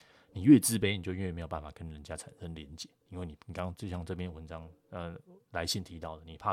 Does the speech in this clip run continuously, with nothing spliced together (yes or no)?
no